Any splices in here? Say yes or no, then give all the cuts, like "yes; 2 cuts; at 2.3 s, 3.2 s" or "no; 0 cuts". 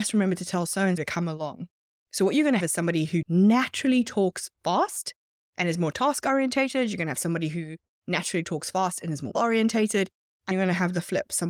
yes; 4 cuts; at 1.0 s, 2.6 s, 9.3 s, 10.5 s